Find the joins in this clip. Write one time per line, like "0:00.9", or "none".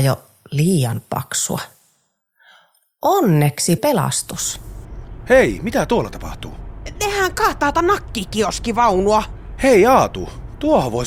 0:03.8
0:07.7